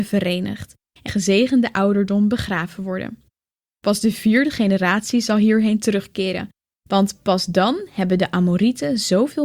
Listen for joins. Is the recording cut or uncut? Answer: cut